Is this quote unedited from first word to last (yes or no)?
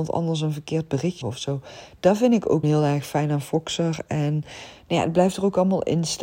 no